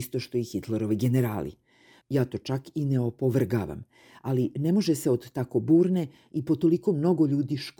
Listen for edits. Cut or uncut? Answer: uncut